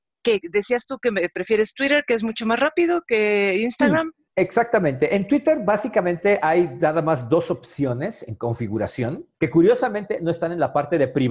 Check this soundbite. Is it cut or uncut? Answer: cut